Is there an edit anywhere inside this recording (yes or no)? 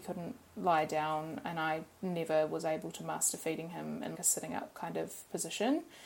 yes